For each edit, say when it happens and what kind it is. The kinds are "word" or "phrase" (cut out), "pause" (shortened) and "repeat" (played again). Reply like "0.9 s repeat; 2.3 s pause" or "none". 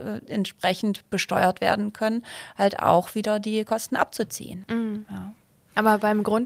none